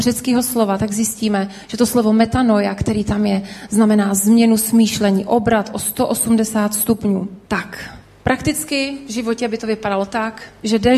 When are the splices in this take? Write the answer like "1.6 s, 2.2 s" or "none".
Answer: 7.4 s